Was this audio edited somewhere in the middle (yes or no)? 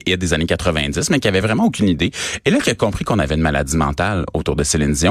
no